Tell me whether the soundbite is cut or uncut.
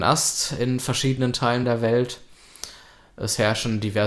uncut